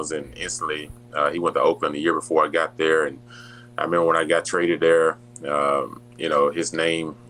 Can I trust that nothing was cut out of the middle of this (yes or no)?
yes